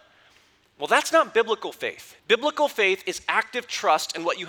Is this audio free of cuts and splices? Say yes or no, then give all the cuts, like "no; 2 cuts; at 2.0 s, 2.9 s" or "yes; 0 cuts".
no; 1 cut; at 2.2 s